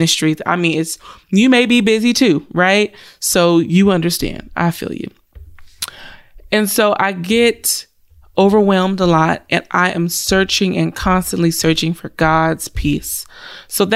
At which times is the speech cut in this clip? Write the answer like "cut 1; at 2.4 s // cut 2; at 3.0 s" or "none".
none